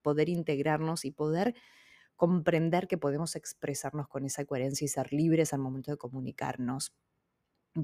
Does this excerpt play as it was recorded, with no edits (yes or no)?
yes